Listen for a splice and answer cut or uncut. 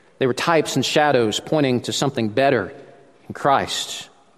uncut